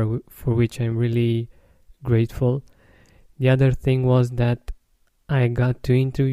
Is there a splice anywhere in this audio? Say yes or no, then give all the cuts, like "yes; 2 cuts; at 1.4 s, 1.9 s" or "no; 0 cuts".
no; 0 cuts